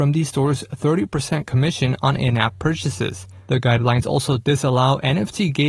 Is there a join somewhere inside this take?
no; 0 cuts

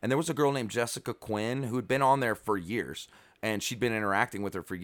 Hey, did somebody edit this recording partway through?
no; 0 cuts

